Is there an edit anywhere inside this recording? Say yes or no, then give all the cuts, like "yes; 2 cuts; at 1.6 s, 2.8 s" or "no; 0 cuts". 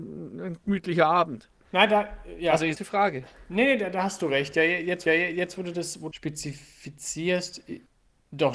yes; 3 cuts; at 2.7 s, 5.1 s, 6.1 s